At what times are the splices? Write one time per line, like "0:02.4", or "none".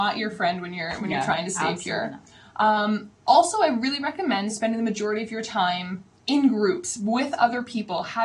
0:06.2

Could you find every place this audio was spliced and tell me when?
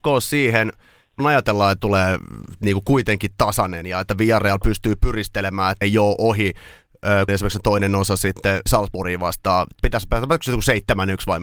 0:01.2
0:01.8
0:05.8
0:07.3
0:08.7
0:09.8

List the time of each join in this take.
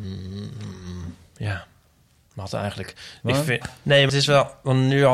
0:03.6
0:04.1

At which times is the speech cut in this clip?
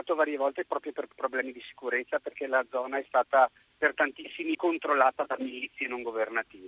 0:04.5

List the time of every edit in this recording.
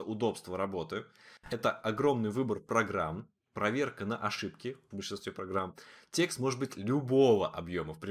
0:04.9

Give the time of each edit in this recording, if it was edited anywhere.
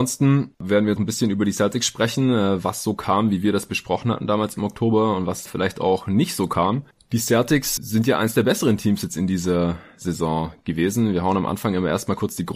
0:01.0
0:05.5
0:07.8

